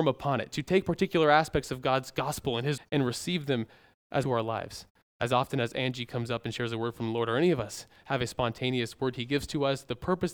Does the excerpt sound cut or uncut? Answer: cut